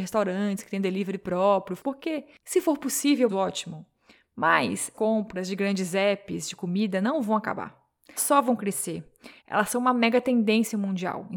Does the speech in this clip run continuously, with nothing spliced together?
no; 5 cuts; at 1.8 s, 3.3 s, 4.9 s, 8.2 s, 9.4 s

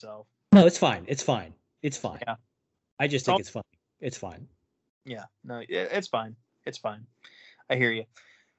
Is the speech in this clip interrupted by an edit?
no; 0 cuts

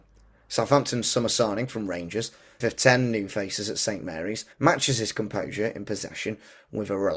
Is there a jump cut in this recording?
yes; 2 cuts; at 2.6 s, 4.5 s

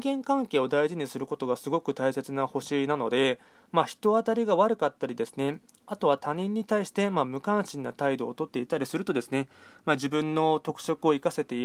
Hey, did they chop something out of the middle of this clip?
no; 0 cuts

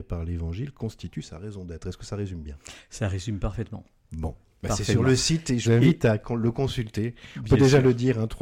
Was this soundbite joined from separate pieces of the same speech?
yes; 1 cut; at 5.6 s

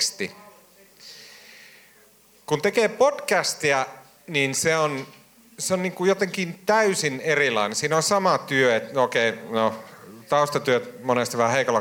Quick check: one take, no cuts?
yes; 0 cuts

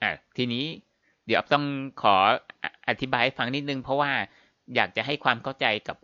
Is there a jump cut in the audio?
no; 0 cuts

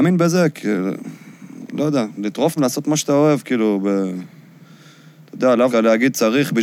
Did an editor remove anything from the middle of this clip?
yes; 3 cuts; at 2.2 s, 2.6 s, 5.7 s

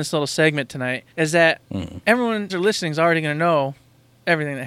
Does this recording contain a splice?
yes; 3 cuts; at 1.1 s, 1.6 s, 2.5 s

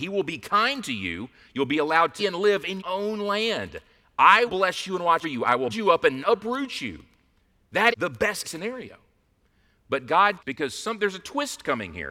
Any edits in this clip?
yes; 9 cuts; at 2.2 s, 2.8 s, 4.5 s, 5.2 s, 5.7 s, 6.2 s, 7.9 s, 8.4 s, 10.4 s

